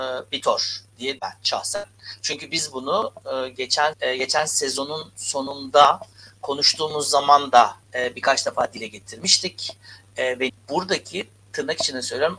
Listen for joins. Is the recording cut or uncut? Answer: cut